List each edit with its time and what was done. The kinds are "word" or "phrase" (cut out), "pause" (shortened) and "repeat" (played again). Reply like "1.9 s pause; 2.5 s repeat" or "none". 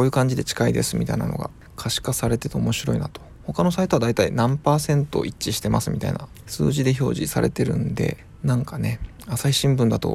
none